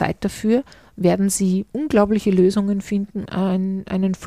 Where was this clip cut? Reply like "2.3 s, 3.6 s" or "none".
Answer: 1.7 s, 3.3 s